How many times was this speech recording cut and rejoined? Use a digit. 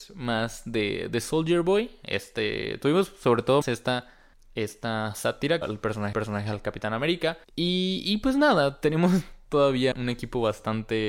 6